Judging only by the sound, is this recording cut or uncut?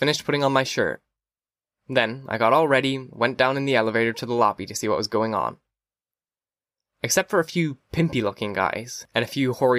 uncut